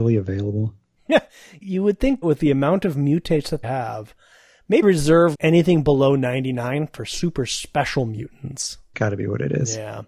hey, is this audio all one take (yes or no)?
no